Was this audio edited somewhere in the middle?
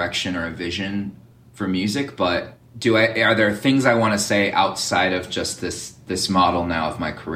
no; 0 cuts

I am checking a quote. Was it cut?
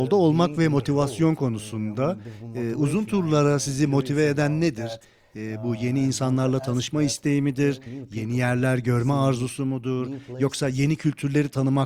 no; 0 cuts

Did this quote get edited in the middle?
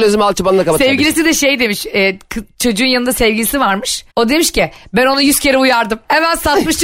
yes; 1 cut; at 4.1 s

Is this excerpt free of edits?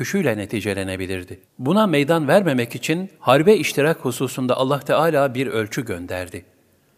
no; 2 cuts; at 1.4 s, 3.1 s

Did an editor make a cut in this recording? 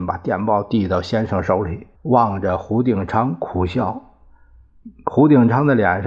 yes; 1 cut; at 2.0 s

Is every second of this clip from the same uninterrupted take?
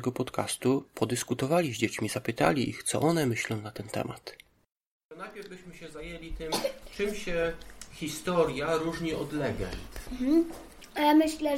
yes; 0 cuts

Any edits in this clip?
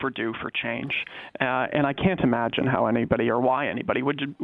no; 0 cuts

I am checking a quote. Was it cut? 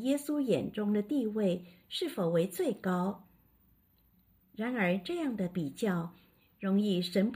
no; 0 cuts

